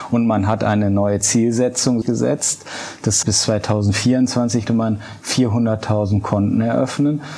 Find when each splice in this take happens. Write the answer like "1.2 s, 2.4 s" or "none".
2.0 s, 3.2 s, 4.7 s